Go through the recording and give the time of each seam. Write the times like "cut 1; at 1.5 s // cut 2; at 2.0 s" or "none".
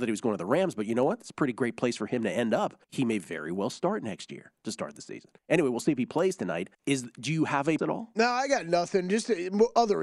cut 1; at 2.8 s // cut 2; at 5.4 s // cut 3; at 6.7 s // cut 4; at 7.8 s